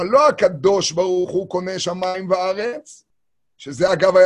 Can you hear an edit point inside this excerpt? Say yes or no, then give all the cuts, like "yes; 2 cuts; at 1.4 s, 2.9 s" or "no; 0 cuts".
no; 0 cuts